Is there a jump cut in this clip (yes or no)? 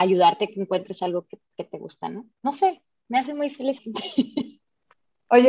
yes